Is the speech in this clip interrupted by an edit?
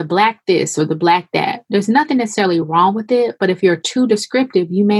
no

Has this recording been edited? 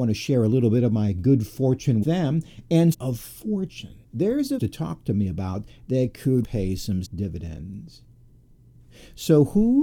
yes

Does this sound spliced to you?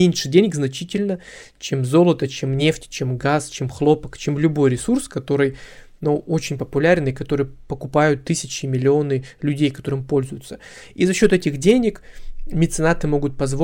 no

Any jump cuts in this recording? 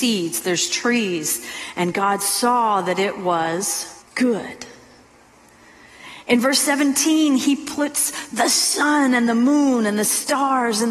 yes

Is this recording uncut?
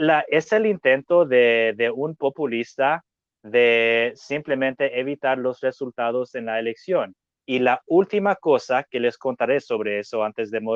yes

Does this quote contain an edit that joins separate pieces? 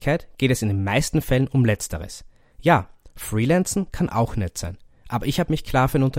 no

